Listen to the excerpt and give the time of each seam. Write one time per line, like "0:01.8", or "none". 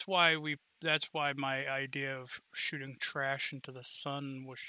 none